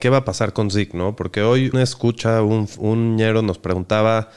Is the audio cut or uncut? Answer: cut